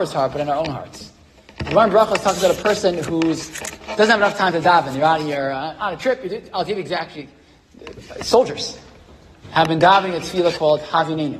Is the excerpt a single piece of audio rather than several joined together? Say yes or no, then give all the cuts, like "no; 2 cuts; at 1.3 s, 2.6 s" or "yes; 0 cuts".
yes; 0 cuts